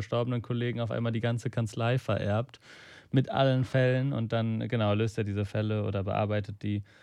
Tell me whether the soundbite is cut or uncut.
uncut